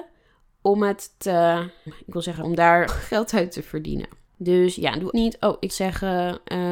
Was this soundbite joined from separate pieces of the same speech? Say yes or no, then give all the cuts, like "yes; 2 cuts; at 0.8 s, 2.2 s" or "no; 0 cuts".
yes; 6 cuts; at 1.9 s, 2.4 s, 2.9 s, 4.3 s, 5.1 s, 5.7 s